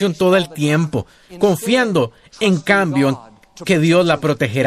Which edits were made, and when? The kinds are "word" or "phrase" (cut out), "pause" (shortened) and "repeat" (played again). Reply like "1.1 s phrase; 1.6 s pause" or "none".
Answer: none

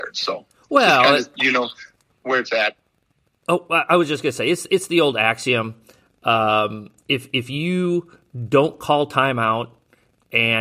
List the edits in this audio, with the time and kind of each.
none

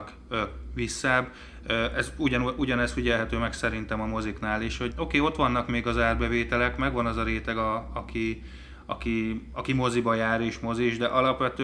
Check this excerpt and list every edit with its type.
4.9 s word

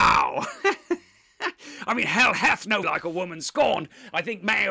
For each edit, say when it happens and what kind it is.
2.8 s word

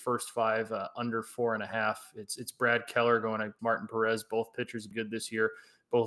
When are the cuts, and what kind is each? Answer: 3.6 s phrase; 4.9 s phrase

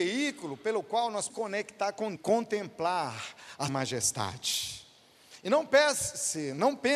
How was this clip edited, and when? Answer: 1.3 s phrase; 2.2 s phrase; 3.7 s word

